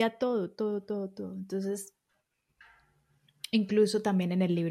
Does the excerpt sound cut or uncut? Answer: uncut